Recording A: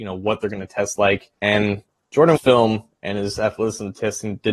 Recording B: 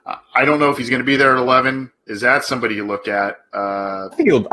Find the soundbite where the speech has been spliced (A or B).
A